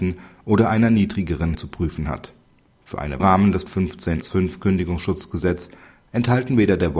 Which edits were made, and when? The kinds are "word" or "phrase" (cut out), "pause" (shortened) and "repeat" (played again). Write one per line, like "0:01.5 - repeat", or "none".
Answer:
0:01.5 - word
0:03.2 - phrase
0:03.7 - word
0:04.2 - word